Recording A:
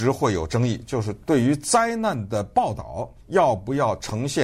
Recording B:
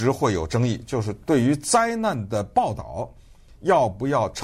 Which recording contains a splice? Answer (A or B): A